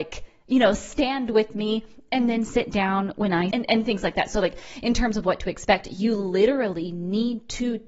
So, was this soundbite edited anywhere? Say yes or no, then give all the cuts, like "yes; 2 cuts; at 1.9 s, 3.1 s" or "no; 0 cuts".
yes; 1 cut; at 3.5 s